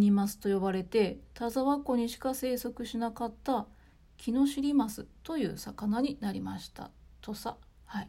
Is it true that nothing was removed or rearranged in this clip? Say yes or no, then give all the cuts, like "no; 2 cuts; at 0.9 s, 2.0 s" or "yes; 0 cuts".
yes; 0 cuts